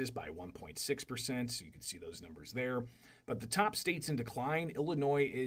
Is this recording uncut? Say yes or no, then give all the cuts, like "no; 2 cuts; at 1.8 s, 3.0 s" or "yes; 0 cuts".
yes; 0 cuts